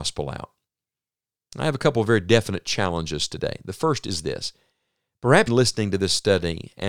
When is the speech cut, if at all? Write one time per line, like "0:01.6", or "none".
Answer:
0:05.5